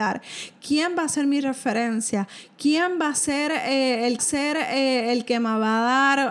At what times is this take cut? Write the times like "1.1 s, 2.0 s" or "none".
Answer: 4.2 s